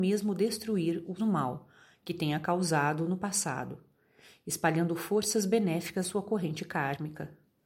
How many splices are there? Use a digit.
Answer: 2